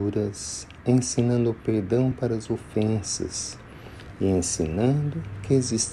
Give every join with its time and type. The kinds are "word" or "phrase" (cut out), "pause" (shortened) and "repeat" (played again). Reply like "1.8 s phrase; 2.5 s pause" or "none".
none